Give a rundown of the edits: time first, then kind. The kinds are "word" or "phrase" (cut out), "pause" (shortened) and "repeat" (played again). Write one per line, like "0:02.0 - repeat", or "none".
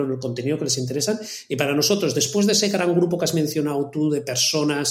none